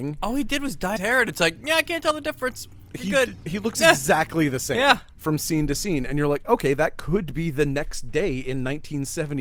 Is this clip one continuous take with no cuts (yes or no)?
no